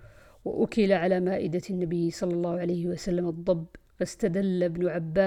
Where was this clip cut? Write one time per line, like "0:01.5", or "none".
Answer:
0:03.9